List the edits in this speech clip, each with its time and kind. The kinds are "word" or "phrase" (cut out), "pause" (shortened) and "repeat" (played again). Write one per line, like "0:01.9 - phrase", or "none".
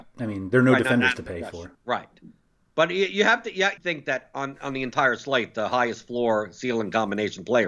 0:01.7 - pause
0:03.8 - phrase